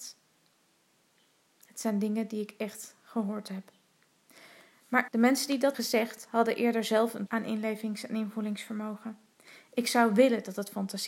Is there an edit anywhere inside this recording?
yes; 3 cuts; at 5.1 s, 5.7 s, 7.3 s

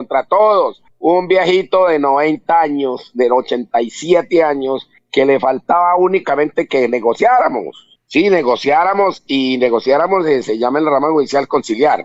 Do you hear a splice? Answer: no; 0 cuts

